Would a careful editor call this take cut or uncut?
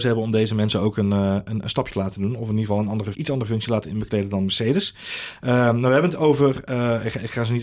cut